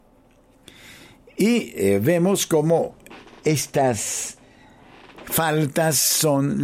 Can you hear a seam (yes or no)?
no